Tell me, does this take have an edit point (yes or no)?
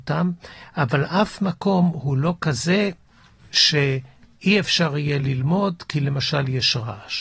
no